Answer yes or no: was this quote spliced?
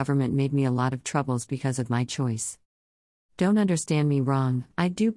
no